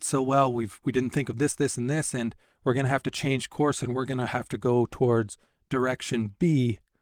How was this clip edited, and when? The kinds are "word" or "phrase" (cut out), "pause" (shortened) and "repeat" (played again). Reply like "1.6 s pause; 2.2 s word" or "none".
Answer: none